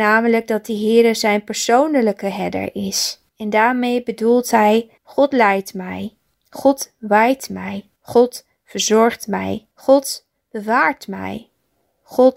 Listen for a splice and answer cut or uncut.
cut